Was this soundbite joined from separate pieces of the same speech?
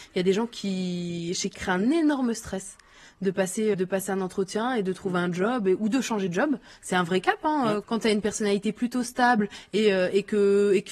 yes; 3 cuts; at 1.5 s, 3.7 s, 7.8 s

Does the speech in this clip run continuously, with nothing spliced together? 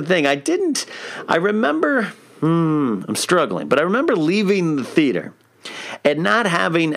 yes; 0 cuts

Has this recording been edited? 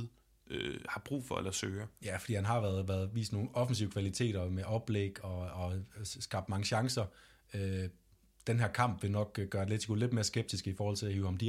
no; 0 cuts

